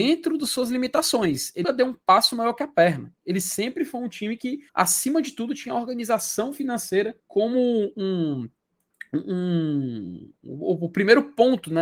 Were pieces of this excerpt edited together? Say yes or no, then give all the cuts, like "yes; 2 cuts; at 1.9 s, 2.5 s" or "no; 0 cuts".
yes; 4 cuts; at 1.6 s, 3.2 s, 4.7 s, 7.2 s